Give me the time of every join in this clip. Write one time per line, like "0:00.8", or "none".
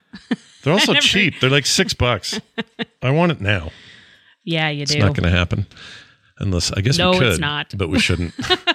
none